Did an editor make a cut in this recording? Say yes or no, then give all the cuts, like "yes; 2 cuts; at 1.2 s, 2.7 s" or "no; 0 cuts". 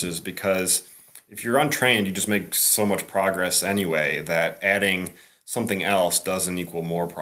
no; 0 cuts